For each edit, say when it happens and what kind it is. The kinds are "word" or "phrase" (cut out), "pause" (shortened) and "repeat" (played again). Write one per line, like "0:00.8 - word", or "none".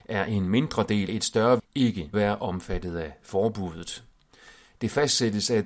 0:01.1 - word
0:01.6 - word
0:02.1 - word